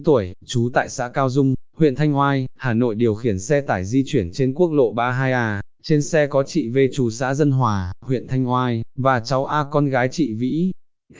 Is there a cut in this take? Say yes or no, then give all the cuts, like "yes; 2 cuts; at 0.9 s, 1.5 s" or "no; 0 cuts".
no; 0 cuts